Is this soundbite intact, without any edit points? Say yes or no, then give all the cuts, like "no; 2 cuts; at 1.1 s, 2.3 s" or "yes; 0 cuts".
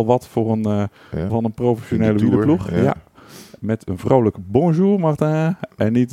no; 1 cut; at 1.3 s